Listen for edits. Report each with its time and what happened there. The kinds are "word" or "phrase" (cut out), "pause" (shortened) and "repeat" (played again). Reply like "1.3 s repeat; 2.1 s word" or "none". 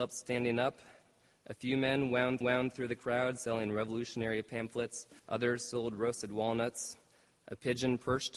2.4 s repeat; 5.2 s pause